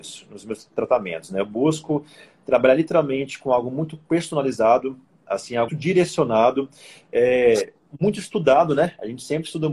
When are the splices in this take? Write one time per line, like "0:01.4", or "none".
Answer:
0:05.7